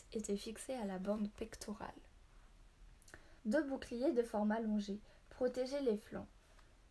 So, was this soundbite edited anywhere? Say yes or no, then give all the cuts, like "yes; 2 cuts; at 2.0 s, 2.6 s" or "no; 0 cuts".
yes; 1 cut; at 3.4 s